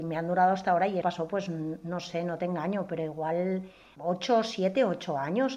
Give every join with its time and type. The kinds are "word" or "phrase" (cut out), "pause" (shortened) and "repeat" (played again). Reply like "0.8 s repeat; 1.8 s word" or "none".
1.0 s word; 4.0 s word